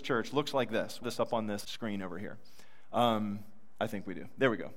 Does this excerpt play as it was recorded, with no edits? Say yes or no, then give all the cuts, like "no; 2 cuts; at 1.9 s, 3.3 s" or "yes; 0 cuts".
no; 2 cuts; at 1.0 s, 1.6 s